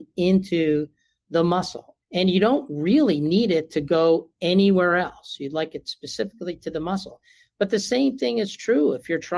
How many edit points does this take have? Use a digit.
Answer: 1